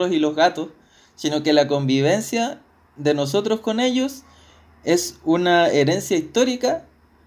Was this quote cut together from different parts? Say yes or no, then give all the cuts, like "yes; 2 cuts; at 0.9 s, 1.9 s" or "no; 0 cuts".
no; 0 cuts